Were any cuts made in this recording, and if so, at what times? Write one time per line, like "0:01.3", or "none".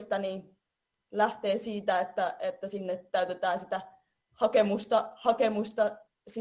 none